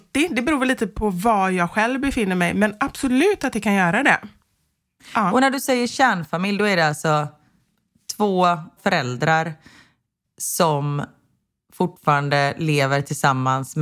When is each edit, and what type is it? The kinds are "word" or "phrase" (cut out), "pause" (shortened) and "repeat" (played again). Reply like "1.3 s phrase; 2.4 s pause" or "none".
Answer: none